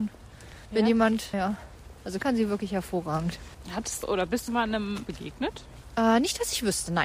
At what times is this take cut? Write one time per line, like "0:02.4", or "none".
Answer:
0:01.3
0:02.2
0:04.0
0:04.5
0:05.0